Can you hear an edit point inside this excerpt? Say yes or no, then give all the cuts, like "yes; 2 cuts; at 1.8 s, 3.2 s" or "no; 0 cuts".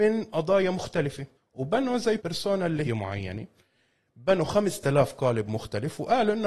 yes; 3 cuts; at 1.3 s, 2.2 s, 2.8 s